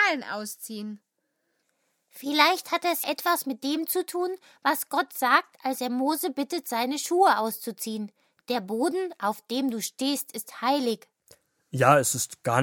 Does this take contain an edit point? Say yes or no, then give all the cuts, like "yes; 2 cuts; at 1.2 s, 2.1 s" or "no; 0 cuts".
yes; 1 cut; at 3.0 s